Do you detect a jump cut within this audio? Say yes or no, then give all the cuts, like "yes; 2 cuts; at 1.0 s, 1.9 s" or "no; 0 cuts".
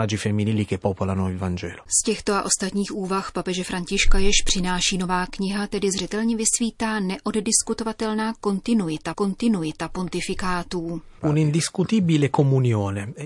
yes; 1 cut; at 9.1 s